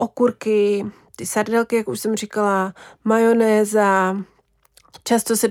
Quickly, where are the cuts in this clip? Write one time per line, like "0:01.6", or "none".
none